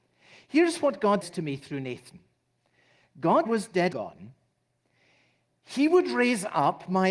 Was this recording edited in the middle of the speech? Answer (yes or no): yes